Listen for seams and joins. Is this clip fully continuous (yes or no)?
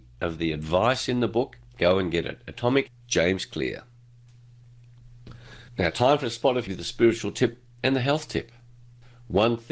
no